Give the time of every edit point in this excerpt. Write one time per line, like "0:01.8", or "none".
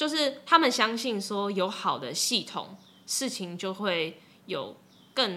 none